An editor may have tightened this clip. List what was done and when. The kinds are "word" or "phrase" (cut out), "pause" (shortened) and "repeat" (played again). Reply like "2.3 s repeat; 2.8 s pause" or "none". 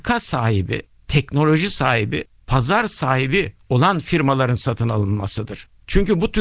none